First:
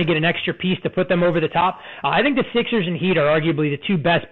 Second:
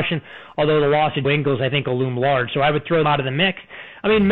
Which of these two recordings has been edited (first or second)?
second